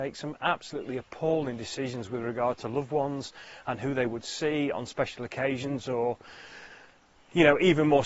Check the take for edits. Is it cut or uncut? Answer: uncut